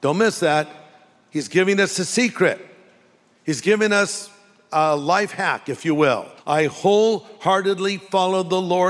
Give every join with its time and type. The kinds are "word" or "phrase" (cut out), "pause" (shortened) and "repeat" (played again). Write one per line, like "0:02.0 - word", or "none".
0:06.4 - pause